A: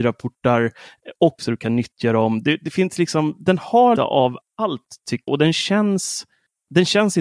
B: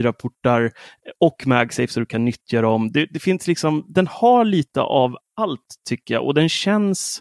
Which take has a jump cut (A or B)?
A